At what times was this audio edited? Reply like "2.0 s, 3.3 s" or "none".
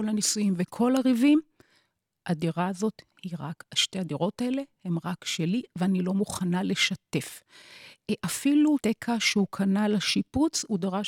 8.8 s

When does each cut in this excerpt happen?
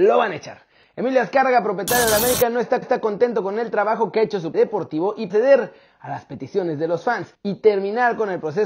2.8 s, 4.5 s, 5.3 s, 7.3 s

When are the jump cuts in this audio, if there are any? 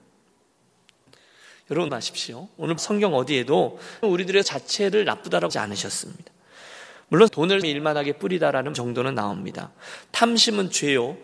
1.9 s, 2.8 s, 4.0 s, 4.4 s, 5.5 s, 7.3 s, 7.6 s, 8.7 s

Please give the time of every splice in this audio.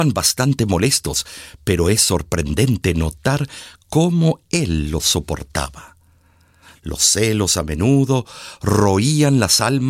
none

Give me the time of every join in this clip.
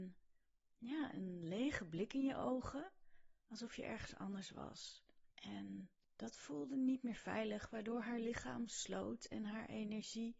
1.1 s, 5.3 s

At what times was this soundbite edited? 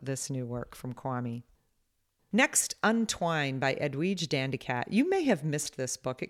none

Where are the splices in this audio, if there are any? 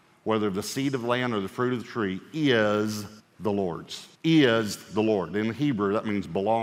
3.2 s, 4.1 s

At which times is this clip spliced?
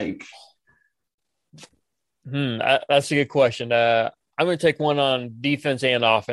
none

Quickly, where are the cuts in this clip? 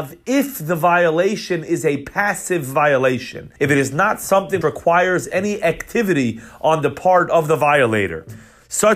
3.6 s, 4.6 s

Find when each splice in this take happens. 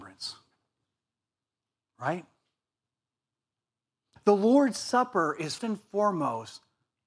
4.2 s, 5.6 s

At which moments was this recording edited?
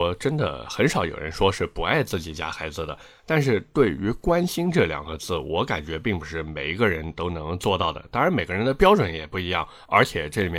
none

